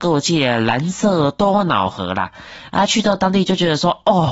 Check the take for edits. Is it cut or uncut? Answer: uncut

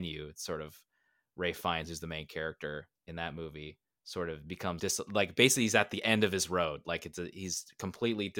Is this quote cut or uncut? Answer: cut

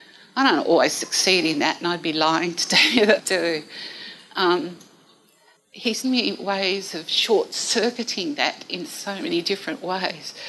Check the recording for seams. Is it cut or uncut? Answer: cut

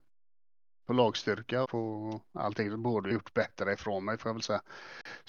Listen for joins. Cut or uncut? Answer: cut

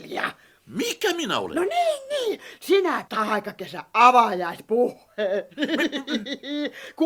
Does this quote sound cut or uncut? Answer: cut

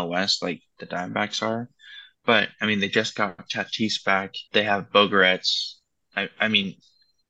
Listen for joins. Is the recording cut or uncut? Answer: cut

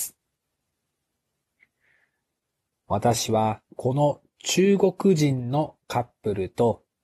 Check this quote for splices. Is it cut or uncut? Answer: cut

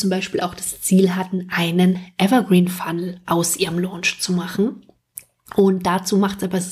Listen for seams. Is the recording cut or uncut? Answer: uncut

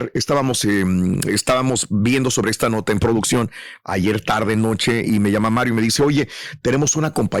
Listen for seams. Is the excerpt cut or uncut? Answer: uncut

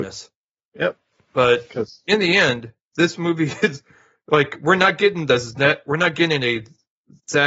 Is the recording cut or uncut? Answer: uncut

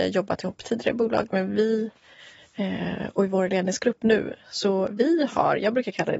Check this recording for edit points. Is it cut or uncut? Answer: uncut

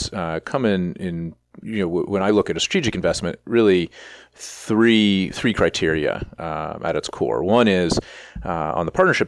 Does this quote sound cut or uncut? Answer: uncut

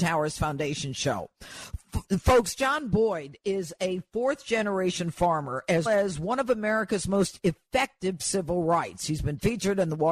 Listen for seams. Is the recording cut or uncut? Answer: cut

